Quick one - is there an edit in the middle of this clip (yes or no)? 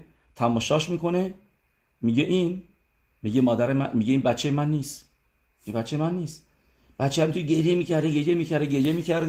no